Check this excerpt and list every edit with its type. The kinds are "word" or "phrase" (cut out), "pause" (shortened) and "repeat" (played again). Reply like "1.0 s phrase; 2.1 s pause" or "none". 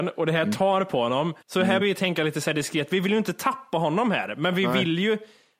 1.4 s pause; 1.8 s word